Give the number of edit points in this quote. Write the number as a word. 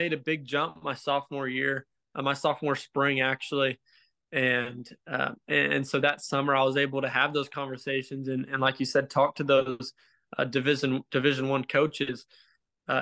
zero